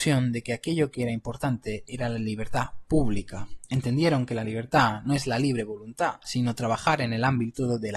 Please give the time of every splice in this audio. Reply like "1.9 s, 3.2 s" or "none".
none